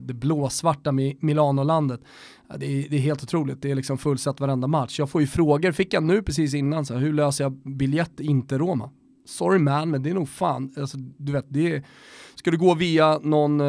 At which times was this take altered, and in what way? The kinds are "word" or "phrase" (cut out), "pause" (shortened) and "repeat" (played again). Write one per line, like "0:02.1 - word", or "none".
none